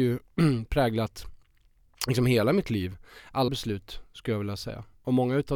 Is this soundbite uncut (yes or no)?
no